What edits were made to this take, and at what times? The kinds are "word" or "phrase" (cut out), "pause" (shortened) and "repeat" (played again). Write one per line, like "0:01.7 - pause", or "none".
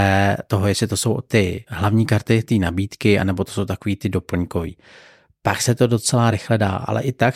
none